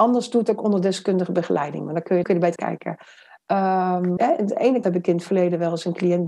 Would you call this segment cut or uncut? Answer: cut